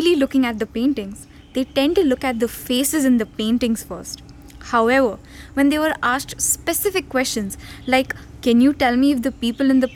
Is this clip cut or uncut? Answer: uncut